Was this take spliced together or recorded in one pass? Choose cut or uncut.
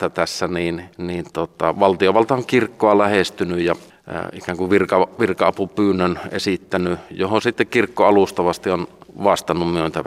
cut